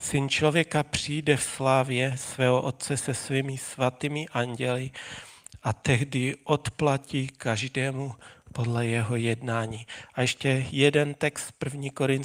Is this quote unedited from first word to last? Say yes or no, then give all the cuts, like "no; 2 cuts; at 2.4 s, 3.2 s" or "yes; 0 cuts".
yes; 0 cuts